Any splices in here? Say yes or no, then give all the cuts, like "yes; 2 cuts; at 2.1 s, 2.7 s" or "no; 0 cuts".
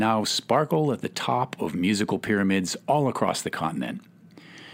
no; 0 cuts